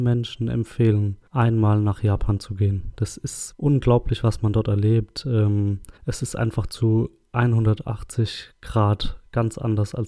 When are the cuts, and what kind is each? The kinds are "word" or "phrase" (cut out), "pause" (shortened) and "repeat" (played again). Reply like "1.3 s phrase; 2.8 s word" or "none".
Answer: 1.3 s pause; 3.5 s word; 6.0 s pause